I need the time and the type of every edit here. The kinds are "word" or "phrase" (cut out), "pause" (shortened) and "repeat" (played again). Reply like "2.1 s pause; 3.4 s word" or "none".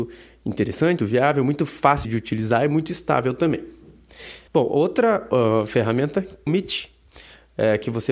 1.0 s word; 2.0 s word; 4.5 s pause; 6.5 s phrase